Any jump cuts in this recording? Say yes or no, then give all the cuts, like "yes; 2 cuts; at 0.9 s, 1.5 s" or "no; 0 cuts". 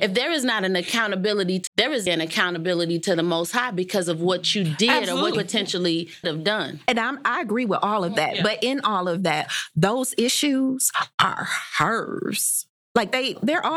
yes; 4 cuts; at 1.7 s, 2.1 s, 5.3 s, 6.2 s